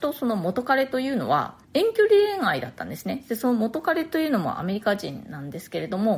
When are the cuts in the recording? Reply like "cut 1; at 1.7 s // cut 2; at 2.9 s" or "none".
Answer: cut 1; at 1.6 s